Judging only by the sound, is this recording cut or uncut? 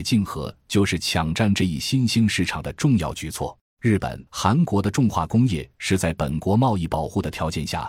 cut